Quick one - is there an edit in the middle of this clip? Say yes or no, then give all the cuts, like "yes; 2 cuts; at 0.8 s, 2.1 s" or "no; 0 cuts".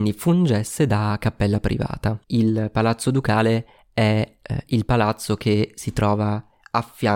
yes; 1 cut; at 2.2 s